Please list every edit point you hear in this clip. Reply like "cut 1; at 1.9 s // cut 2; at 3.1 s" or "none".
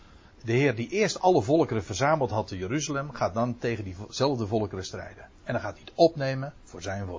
none